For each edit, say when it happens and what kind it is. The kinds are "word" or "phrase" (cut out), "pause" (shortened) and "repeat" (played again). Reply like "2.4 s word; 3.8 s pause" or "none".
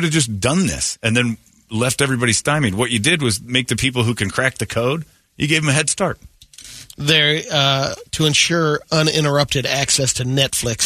6.9 s pause